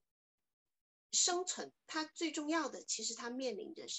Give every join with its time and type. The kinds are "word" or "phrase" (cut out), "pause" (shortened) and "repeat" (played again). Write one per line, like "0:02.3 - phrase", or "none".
0:01.8 - pause